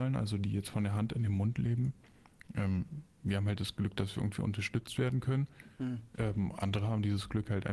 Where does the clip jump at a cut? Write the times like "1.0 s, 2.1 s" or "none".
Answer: none